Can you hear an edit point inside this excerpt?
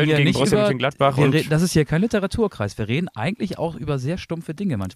no; 0 cuts

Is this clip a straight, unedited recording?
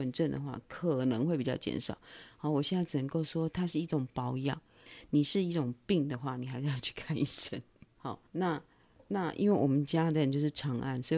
no; 1 cut; at 8.3 s

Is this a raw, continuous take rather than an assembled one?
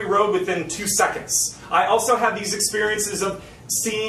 yes; 0 cuts

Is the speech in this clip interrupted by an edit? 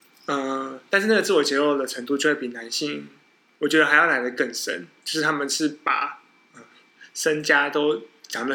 no; 0 cuts

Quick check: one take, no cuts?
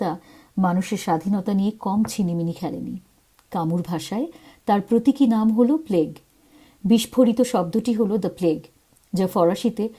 yes; 0 cuts

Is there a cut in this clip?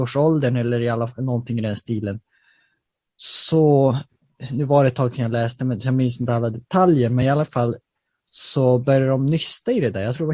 no; 0 cuts

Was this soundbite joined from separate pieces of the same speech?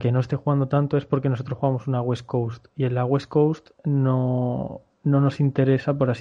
no; 0 cuts

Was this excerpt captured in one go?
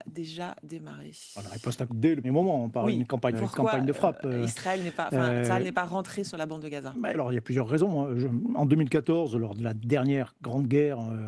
no; 4 cuts; at 1.9 s, 2.2 s, 3.3 s, 7.1 s

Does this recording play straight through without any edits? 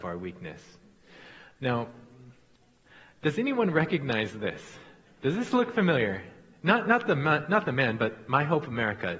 yes; 0 cuts

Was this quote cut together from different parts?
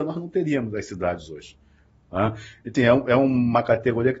yes; 1 cut; at 2.7 s

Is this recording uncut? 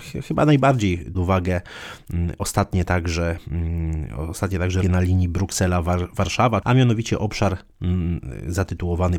no; 3 cuts; at 1.1 s, 4.8 s, 6.6 s

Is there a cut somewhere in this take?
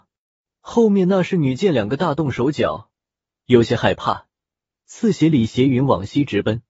no; 0 cuts

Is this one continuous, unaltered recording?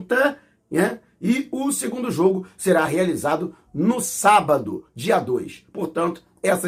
yes; 0 cuts

